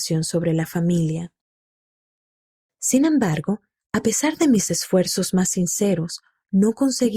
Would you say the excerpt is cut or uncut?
uncut